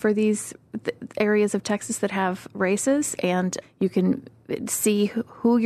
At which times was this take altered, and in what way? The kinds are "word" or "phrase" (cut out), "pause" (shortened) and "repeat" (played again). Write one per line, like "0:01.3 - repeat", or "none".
0:03.6 - word